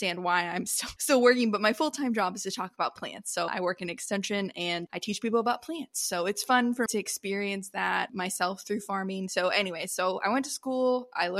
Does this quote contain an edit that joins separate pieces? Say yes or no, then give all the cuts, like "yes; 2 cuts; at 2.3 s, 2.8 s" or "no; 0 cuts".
yes; 2 cuts; at 3.5 s, 6.9 s